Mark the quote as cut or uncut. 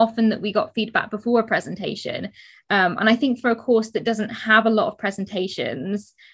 uncut